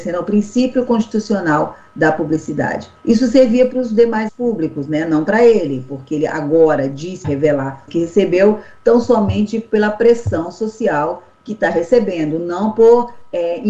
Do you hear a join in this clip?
yes; 4 cuts; at 3.0 s, 4.3 s, 7.2 s, 7.9 s

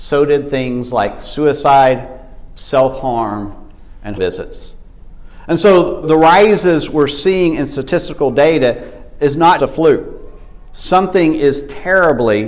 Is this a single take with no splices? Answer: no; 3 cuts; at 4.2 s, 6.0 s, 9.6 s

